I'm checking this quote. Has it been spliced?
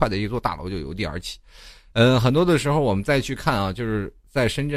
no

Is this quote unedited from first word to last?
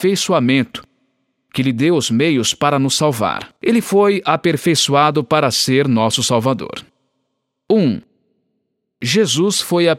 no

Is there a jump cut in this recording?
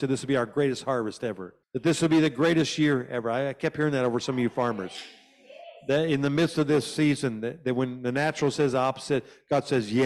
yes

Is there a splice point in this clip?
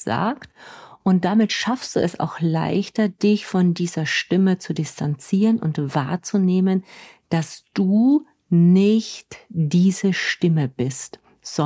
no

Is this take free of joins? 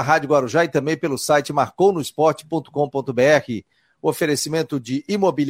yes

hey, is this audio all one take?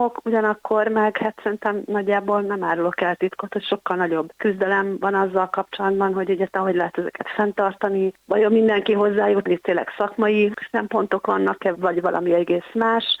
no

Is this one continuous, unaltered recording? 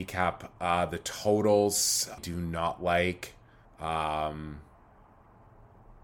no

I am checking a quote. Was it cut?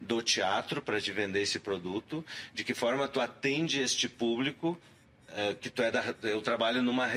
no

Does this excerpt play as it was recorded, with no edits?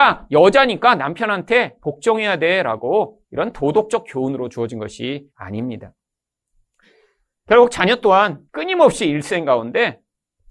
no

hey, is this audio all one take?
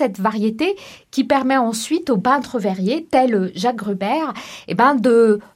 yes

